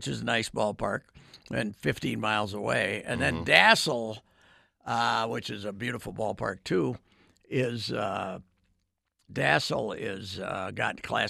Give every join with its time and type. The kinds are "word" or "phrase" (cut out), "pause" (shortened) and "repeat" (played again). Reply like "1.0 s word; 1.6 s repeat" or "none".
none